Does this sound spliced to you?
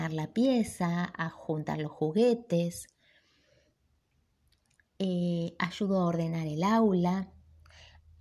no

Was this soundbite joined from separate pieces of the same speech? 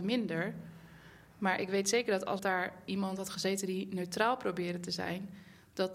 yes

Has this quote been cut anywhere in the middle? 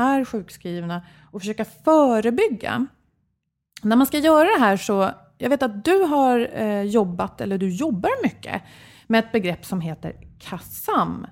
no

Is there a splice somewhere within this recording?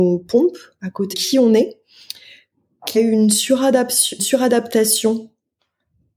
yes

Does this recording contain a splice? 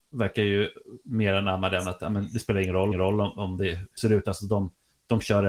yes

